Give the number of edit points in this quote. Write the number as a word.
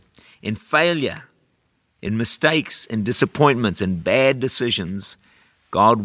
zero